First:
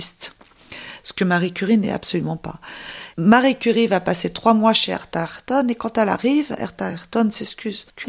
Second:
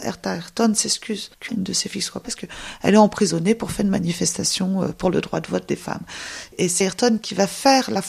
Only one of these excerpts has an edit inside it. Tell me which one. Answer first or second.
second